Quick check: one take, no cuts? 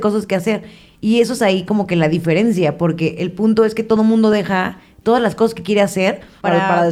yes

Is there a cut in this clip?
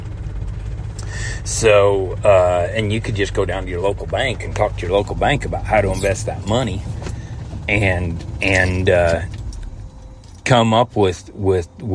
no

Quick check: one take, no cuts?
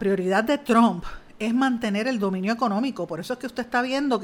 yes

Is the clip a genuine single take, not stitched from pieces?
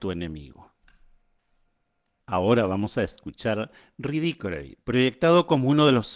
no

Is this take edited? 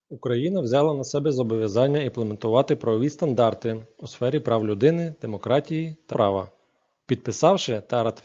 yes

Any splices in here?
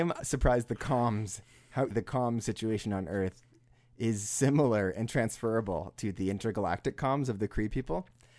yes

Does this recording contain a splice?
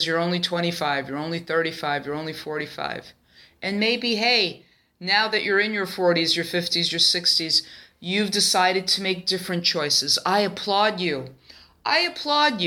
no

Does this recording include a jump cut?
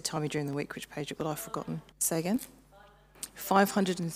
yes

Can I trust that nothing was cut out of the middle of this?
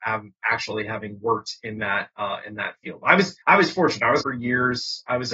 no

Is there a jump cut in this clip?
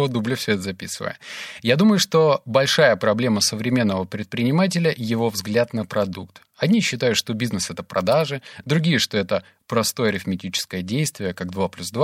no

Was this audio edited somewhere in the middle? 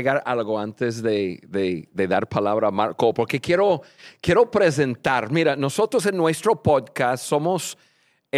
no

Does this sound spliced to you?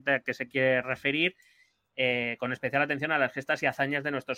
no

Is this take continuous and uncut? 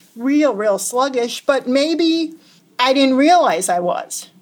no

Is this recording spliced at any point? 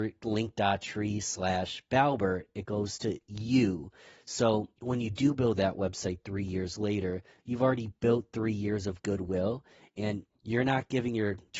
no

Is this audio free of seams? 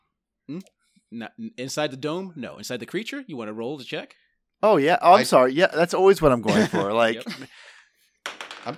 yes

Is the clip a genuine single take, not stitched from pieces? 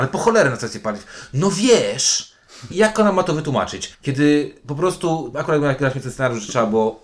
no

